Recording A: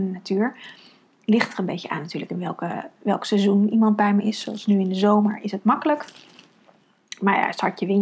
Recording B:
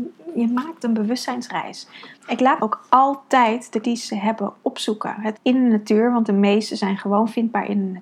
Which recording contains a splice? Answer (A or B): B